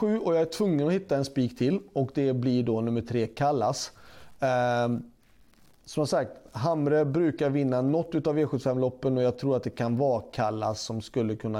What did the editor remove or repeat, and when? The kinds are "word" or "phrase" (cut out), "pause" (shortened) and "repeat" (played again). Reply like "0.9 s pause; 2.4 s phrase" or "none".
none